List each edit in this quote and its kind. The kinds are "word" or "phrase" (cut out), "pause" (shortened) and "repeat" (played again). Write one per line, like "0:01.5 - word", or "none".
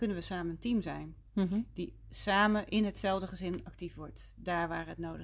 none